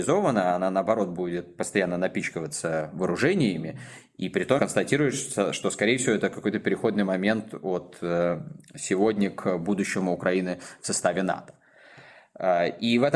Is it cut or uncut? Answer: cut